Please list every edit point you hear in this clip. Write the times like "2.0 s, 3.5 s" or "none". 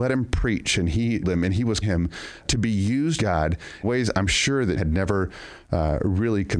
1.2 s, 1.8 s, 2.4 s, 3.2 s, 3.8 s, 4.8 s